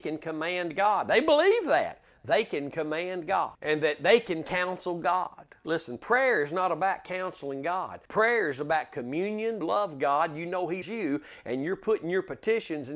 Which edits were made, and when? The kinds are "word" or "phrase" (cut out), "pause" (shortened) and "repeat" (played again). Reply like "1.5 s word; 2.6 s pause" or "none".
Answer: 3.5 s pause; 8.1 s pause; 9.6 s phrase; 10.8 s word